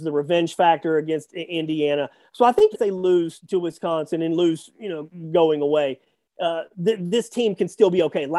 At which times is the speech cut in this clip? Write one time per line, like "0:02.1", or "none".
0:02.7
0:03.4
0:06.7